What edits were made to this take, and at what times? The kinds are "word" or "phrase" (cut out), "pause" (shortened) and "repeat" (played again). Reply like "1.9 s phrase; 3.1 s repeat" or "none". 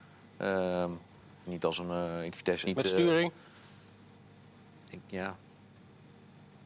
1.5 s phrase; 2.3 s word; 2.6 s word